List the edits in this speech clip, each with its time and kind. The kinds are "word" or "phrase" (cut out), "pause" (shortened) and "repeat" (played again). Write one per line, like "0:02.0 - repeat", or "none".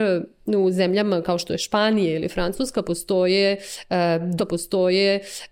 0:04.4 - repeat